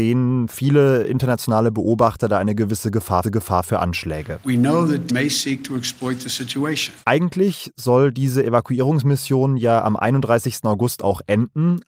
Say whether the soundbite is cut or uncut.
cut